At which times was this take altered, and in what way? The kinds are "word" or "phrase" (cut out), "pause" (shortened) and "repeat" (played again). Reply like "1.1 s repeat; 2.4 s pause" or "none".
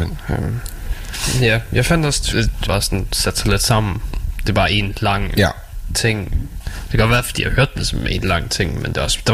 2.3 s word; 2.7 s word